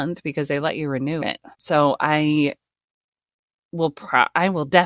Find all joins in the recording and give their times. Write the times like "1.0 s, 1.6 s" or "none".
1.2 s, 1.5 s